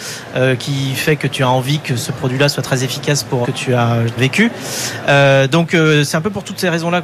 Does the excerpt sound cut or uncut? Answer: cut